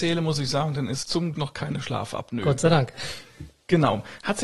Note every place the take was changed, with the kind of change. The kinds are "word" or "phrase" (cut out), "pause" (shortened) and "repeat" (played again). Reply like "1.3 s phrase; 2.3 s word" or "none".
1.0 s word; 1.3 s word